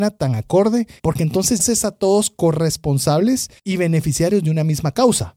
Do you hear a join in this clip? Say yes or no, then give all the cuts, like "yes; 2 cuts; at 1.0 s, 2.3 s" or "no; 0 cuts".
yes; 3 cuts; at 1.0 s, 1.6 s, 3.6 s